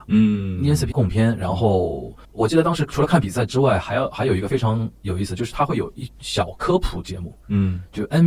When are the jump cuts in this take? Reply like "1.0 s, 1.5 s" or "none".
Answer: 0.9 s, 2.2 s, 6.1 s